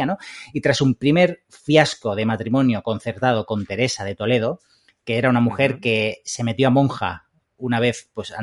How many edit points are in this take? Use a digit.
0